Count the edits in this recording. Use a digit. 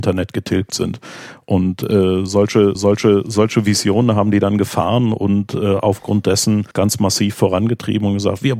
2